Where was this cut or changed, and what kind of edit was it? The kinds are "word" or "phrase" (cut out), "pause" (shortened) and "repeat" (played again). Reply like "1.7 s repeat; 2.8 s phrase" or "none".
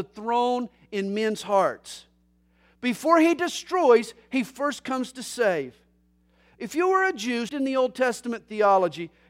7.5 s word